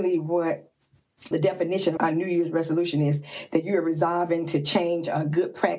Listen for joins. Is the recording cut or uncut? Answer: cut